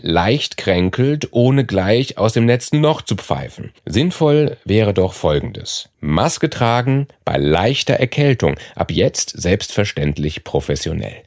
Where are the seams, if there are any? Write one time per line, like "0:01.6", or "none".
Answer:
0:03.8
0:05.9

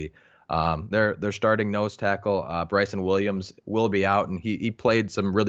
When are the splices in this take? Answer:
0:00.9

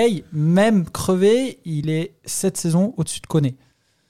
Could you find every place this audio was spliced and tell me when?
none

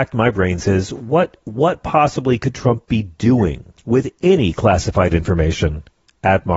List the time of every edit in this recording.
0:03.7

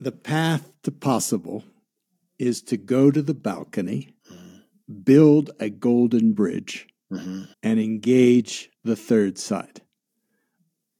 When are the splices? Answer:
0:02.0
0:04.2
0:07.5
0:08.7

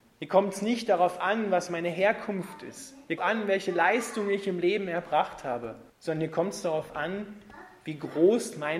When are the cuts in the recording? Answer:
0:03.2
0:05.9

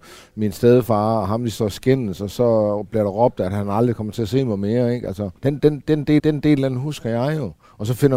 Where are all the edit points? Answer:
0:05.4
0:06.2

